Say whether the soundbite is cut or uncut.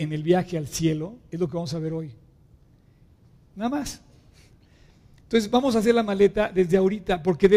uncut